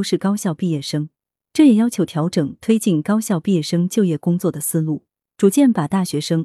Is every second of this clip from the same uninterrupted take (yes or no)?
yes